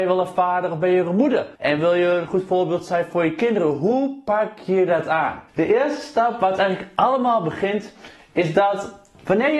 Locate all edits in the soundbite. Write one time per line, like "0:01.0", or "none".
0:01.6
0:05.5